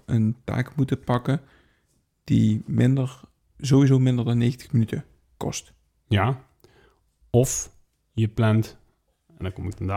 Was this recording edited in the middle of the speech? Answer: no; 0 cuts

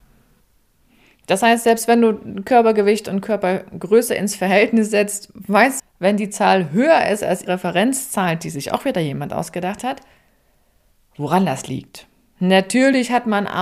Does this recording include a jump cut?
yes; 2 cuts; at 5.8 s, 7.5 s

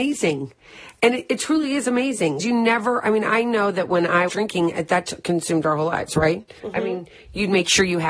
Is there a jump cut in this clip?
yes; 3 cuts; at 2.4 s, 4.3 s, 6.6 s

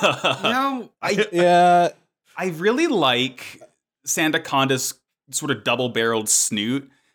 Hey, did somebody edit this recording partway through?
no; 0 cuts

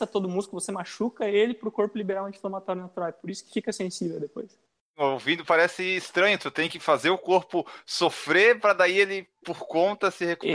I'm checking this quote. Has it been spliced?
no; 0 cuts

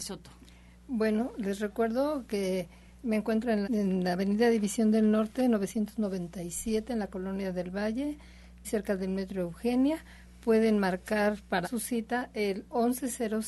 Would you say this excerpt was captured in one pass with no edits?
no; 4 cuts; at 2.9 s, 3.6 s, 8.6 s, 11.6 s

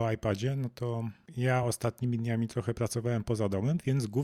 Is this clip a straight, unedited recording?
yes; 0 cuts

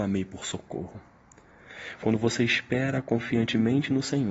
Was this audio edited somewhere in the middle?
no; 0 cuts

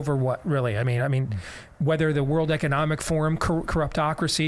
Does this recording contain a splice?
no; 0 cuts

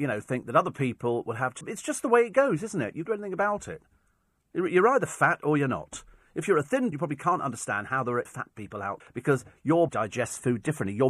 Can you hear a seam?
yes; 6 cuts; at 1.6 s, 3.1 s, 6.9 s, 8.3 s, 9.0 s, 9.9 s

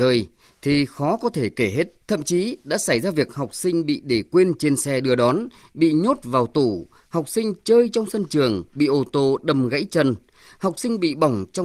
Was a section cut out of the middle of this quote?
yes; 1 cut; at 2.0 s

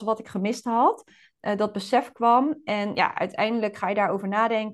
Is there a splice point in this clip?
no; 0 cuts

